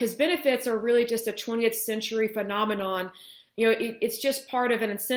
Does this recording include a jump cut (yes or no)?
no